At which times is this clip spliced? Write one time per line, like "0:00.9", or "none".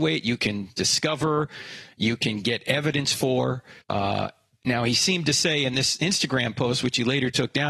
0:03.8